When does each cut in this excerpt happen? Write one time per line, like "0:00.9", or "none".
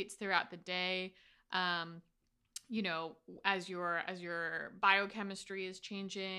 none